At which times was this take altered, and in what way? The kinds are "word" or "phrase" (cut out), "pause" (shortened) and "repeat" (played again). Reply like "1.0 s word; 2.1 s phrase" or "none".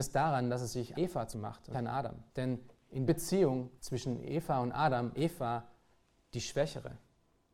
0.9 s word; 1.3 s word; 1.7 s word; 2.3 s pause; 3.1 s word; 3.8 s pause; 5.1 s word